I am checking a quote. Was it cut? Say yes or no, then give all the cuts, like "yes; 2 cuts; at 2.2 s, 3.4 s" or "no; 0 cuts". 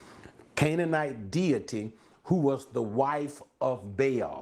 no; 0 cuts